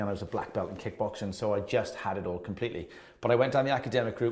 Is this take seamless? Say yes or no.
yes